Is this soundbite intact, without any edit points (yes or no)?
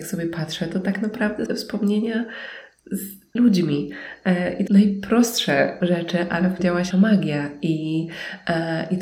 no